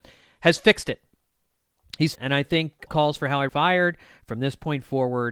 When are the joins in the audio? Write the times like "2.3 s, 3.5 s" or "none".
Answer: 2.2 s, 2.9 s, 3.5 s